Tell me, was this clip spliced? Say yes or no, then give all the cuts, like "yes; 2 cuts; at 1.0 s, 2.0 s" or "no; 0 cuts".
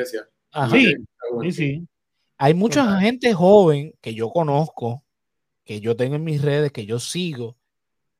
no; 0 cuts